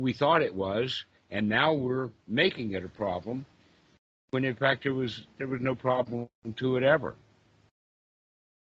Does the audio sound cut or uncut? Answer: uncut